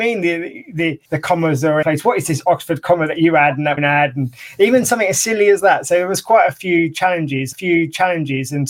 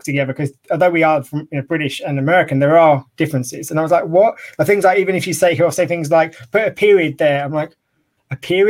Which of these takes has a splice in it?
first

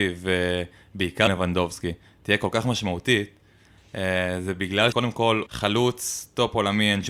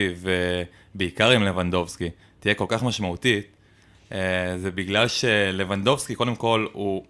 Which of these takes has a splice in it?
first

